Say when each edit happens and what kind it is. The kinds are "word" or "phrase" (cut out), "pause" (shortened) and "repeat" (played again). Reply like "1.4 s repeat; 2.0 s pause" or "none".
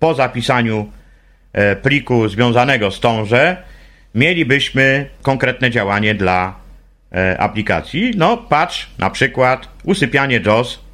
none